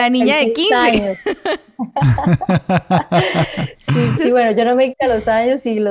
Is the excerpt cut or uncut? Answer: cut